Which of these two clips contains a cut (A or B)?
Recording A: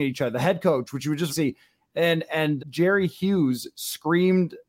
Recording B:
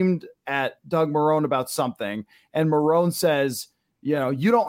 A